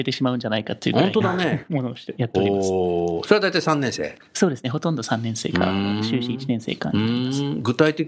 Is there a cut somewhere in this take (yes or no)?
no